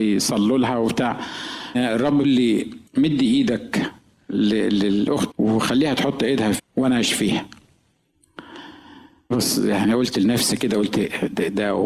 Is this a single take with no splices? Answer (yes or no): no